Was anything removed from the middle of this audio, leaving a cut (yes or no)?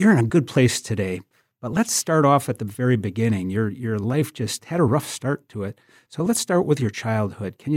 no